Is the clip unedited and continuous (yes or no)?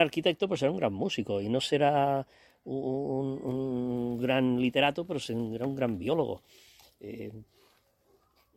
yes